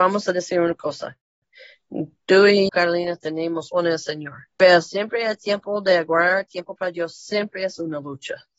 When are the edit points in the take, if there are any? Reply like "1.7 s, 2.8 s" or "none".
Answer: 2.7 s, 3.7 s, 4.5 s